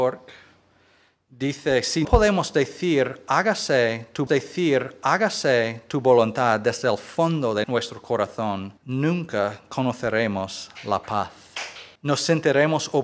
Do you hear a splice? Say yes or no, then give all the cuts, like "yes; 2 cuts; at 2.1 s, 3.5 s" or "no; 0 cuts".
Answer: yes; 5 cuts; at 2.0 s, 4.3 s, 7.6 s, 8.8 s, 12.0 s